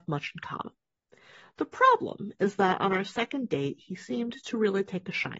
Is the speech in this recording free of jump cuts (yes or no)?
yes